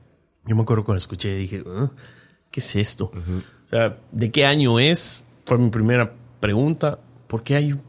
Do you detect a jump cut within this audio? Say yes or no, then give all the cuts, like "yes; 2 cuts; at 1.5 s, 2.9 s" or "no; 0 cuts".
no; 0 cuts